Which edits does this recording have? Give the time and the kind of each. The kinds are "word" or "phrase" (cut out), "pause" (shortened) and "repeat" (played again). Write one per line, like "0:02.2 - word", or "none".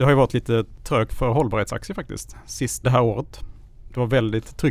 0:01.1 - word
0:02.8 - word